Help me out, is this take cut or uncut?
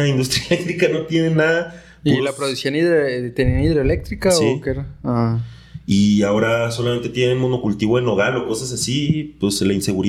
uncut